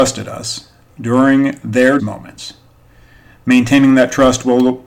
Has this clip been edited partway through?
yes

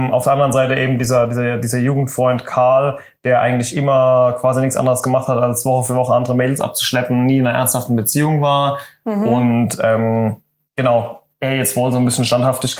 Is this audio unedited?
yes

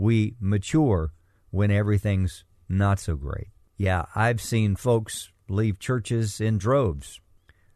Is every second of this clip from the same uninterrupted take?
yes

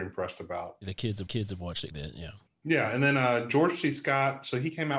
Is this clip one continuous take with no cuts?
no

